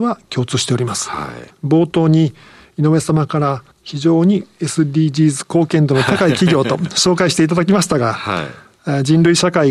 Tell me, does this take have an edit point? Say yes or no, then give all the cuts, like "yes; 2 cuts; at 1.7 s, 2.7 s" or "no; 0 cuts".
yes; 1 cut; at 3.7 s